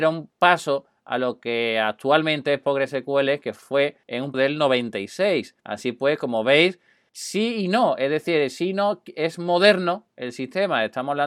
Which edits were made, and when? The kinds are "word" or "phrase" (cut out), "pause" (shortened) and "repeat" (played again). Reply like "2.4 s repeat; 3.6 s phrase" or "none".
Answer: 4.0 s pause; 4.3 s word; 5.6 s pause; 7.1 s word

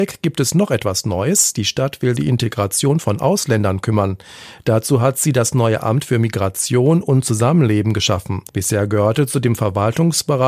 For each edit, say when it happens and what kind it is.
2.2 s phrase; 8.5 s pause

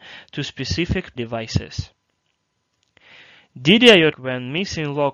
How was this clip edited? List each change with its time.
1.2 s word; 4.1 s word

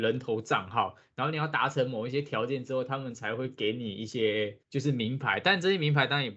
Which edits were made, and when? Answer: 4.6 s pause

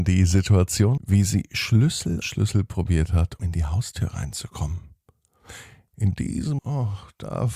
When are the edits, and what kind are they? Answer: 1.0 s word; 2.2 s word; 3.4 s word; 6.6 s word

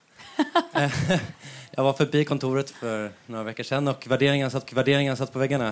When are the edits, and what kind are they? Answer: 4.6 s repeat

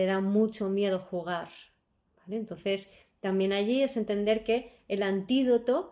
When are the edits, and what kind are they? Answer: none

